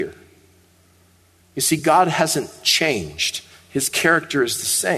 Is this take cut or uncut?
uncut